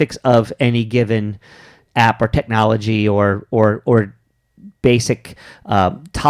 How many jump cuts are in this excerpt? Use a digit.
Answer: 0